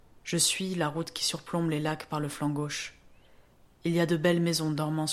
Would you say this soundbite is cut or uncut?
uncut